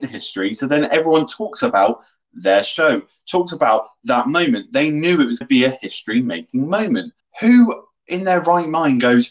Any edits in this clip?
yes; 2 cuts; at 5.4 s, 7.2 s

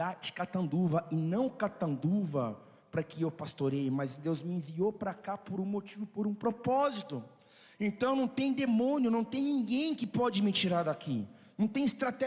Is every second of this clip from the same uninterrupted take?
yes; 0 cuts

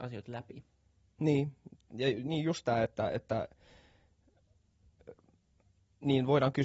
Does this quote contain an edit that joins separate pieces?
no; 0 cuts

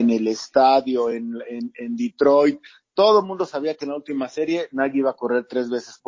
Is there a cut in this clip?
no; 0 cuts

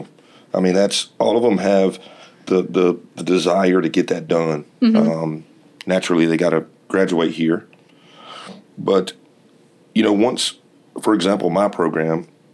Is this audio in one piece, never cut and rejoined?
yes; 0 cuts

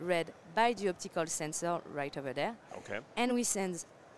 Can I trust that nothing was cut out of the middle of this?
yes; 0 cuts

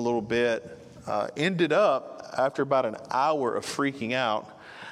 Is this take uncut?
yes; 0 cuts

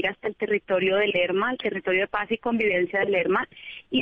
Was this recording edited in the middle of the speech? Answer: no; 0 cuts

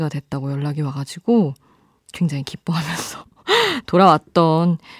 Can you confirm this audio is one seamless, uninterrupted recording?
yes; 0 cuts

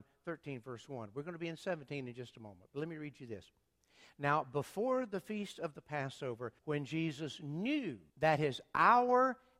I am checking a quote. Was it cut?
yes; 2 cuts; at 6.6 s, 8.1 s

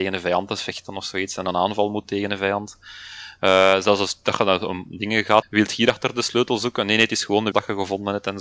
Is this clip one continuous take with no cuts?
no; 3 cuts; at 2.0 s, 5.4 s, 7.5 s

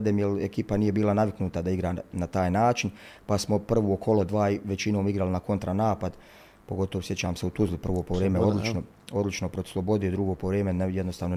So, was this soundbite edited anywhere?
no; 0 cuts

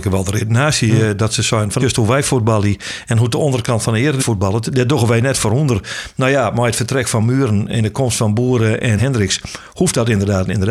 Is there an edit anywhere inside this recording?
yes; 3 cuts; at 1.8 s, 4.2 s, 9.0 s

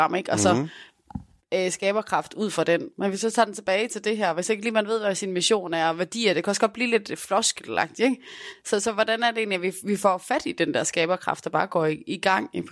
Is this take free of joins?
yes; 0 cuts

